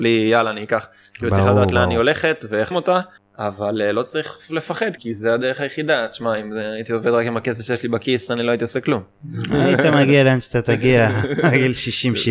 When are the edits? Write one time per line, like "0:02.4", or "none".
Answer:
0:02.7
0:03.2
0:05.0